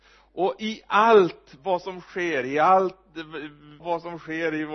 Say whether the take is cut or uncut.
cut